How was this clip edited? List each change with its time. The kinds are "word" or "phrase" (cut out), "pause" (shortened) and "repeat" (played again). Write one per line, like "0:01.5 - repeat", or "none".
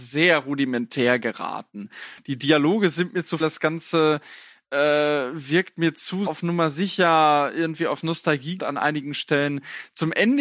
0:03.4 - word
0:06.3 - word
0:08.6 - word